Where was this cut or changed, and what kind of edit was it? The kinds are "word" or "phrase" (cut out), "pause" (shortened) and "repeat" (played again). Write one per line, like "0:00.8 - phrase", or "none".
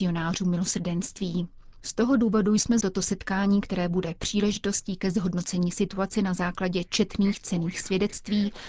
0:02.8 - word